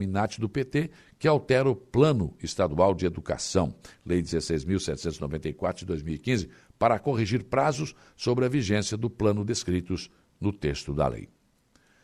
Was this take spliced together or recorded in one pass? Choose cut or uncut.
uncut